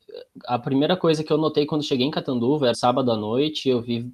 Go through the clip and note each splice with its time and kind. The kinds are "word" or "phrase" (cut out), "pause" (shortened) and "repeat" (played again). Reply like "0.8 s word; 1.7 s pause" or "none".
2.7 s word